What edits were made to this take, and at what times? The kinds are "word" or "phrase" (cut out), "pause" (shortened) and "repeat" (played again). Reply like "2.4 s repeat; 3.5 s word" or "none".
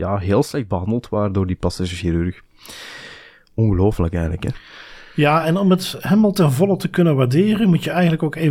none